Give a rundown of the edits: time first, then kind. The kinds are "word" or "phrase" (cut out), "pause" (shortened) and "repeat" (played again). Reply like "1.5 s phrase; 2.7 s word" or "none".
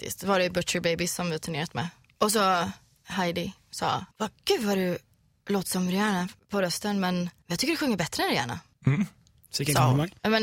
none